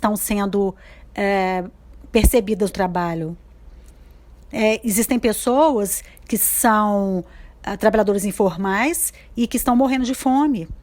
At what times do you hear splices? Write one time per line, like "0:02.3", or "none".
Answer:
0:02.7